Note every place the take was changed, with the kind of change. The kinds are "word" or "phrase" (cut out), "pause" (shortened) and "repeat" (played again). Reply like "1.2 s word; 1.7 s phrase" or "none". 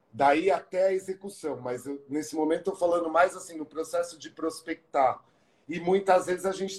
none